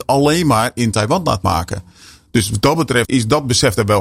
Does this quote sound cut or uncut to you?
uncut